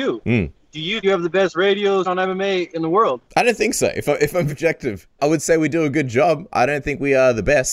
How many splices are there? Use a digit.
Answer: 5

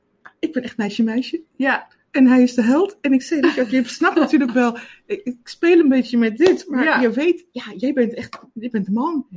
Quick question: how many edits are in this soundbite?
1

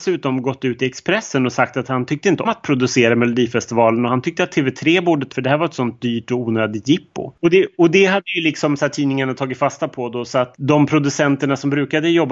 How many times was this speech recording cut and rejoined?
3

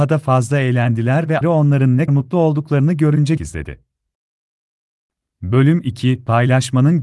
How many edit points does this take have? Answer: 3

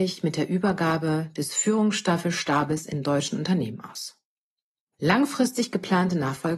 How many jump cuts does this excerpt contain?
0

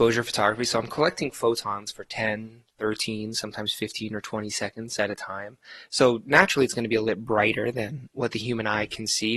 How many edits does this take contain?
1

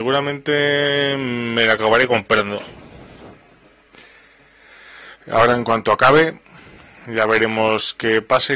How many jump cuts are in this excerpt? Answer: 0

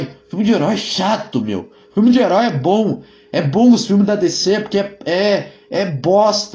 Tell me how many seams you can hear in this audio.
0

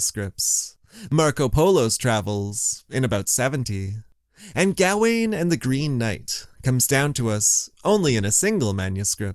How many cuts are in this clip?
0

